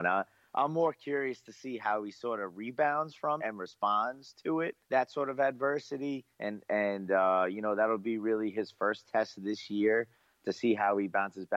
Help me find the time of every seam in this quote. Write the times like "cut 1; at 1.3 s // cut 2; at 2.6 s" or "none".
cut 1; at 3.4 s // cut 2; at 4.8 s // cut 3; at 6.3 s